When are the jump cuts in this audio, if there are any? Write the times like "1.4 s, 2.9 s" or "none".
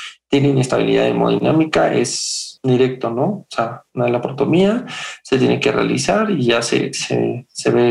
2.6 s, 3.9 s